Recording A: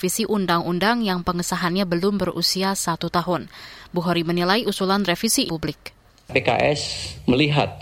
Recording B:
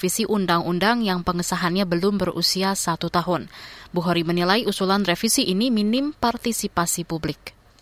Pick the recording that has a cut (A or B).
A